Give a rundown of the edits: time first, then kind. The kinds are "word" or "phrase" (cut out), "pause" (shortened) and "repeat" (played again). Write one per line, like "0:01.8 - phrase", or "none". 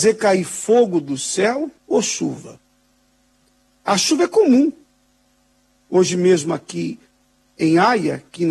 0:01.8 - pause